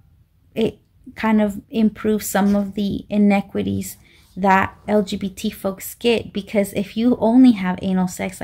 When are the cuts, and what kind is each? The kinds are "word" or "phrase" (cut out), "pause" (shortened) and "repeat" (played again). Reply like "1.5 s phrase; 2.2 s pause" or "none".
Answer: 1.6 s pause; 4.9 s word